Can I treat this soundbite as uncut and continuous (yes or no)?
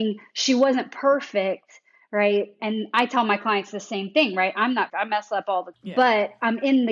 no